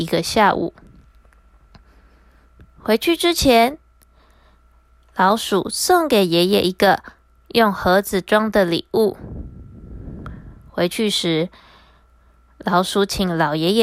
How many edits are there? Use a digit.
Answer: 0